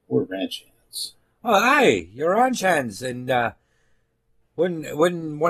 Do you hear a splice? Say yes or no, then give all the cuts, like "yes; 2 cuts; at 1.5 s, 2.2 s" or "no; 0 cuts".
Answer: no; 0 cuts